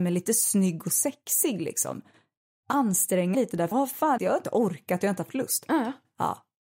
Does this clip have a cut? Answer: yes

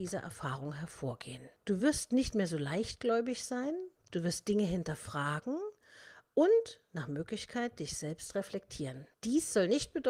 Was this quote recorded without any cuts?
yes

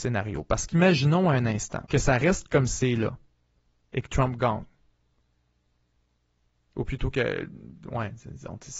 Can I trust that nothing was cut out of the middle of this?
no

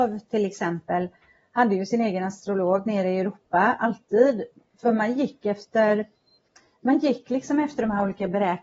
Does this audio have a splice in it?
no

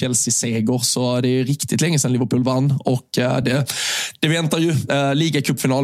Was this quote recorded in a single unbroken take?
yes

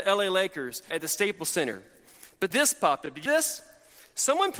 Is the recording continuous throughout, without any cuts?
no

